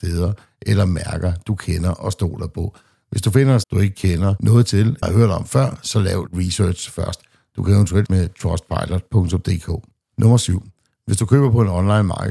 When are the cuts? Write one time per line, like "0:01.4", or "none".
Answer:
0:03.6
0:05.0
0:06.3
0:08.1